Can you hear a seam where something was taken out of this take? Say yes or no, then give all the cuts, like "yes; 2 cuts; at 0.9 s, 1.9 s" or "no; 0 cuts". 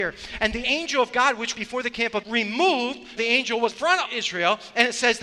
yes; 5 cuts; at 1.5 s, 2.2 s, 3.2 s, 3.7 s, 4.0 s